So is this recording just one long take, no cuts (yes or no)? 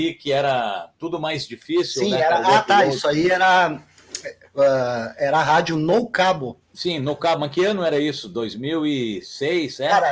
no